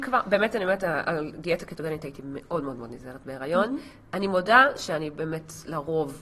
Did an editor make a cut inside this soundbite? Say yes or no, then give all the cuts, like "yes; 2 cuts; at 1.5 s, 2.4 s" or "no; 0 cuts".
no; 0 cuts